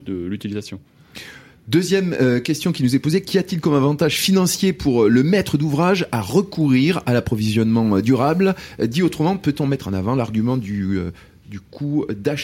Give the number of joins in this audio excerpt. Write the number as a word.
zero